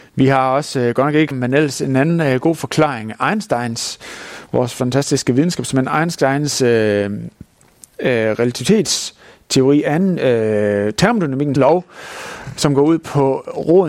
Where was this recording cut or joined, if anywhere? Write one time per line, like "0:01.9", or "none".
0:01.3
0:11.6